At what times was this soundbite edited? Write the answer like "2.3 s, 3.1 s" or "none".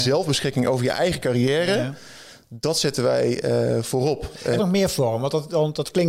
4.6 s